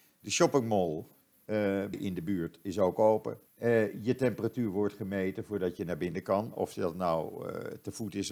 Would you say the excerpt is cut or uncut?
cut